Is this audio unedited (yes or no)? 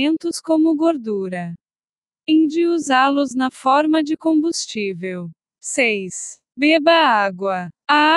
no